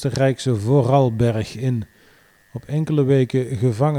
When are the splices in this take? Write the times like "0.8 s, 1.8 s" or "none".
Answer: none